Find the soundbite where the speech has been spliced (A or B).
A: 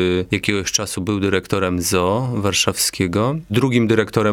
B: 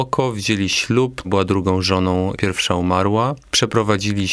B